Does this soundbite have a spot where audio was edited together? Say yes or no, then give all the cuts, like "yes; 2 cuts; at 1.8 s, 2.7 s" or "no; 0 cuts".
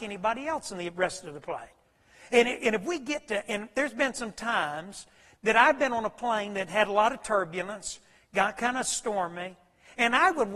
no; 0 cuts